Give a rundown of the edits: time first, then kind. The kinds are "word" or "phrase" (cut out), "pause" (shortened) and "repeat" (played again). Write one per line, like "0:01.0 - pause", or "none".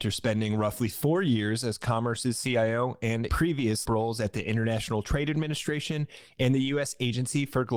0:03.3 - word
0:03.8 - word